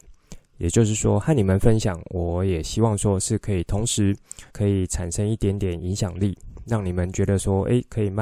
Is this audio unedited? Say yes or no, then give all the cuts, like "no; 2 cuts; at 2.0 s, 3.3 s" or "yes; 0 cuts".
no; 1 cut; at 4.5 s